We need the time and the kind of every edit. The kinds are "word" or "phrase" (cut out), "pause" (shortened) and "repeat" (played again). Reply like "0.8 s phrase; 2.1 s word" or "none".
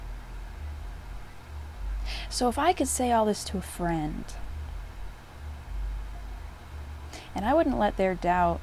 none